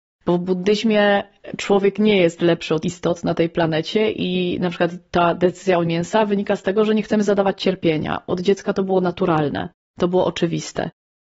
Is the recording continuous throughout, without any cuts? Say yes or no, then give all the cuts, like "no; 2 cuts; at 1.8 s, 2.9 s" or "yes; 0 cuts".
no; 3 cuts; at 2.8 s, 5.8 s, 8.3 s